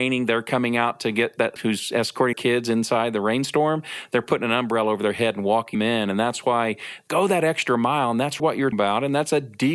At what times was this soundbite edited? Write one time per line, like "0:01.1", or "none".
0:01.6
0:02.3
0:05.7
0:07.1
0:08.4
0:08.7